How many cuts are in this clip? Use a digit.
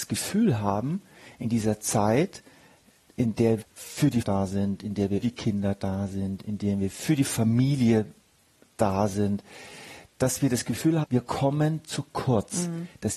4